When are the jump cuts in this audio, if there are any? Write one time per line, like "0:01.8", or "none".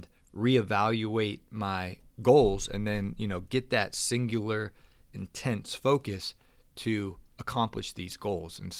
none